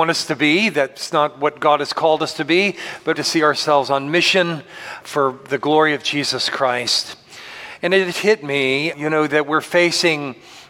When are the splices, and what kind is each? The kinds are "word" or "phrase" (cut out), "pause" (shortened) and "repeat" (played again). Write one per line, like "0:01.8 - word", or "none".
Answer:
0:03.1 - word
0:05.0 - word
0:08.1 - word
0:08.9 - word